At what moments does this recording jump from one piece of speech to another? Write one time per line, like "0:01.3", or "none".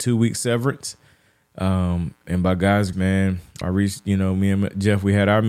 0:02.2
0:02.9
0:03.6